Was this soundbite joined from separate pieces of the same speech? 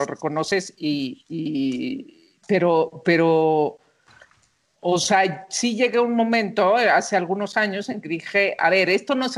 no; 0 cuts

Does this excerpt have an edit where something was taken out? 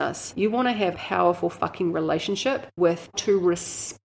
yes; 2 cuts; at 0.9 s, 3.1 s

